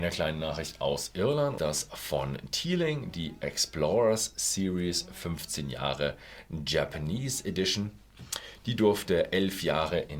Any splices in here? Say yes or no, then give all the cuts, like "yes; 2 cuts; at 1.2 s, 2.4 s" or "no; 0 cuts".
yes; 1 cut; at 1.6 s